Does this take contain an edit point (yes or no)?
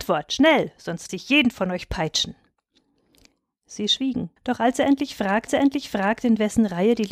yes